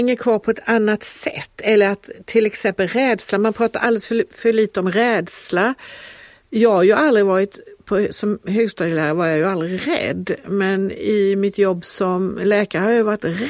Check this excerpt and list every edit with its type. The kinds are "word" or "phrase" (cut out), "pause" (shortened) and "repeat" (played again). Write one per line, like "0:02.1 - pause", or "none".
none